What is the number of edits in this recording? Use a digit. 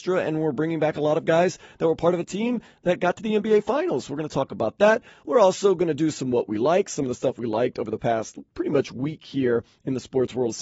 0